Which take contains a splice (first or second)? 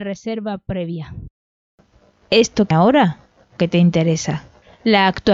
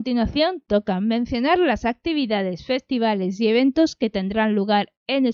first